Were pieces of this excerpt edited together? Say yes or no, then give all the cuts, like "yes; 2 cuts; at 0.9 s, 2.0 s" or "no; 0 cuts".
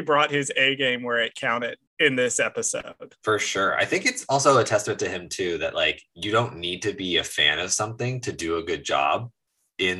yes; 2 cuts; at 1.9 s, 3.2 s